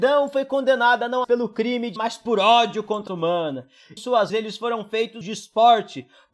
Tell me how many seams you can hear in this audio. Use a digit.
6